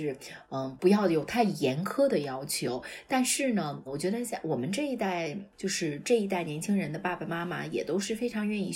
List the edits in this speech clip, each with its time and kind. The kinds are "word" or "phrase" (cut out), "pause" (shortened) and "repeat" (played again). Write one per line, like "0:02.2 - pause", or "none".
0:03.9 - word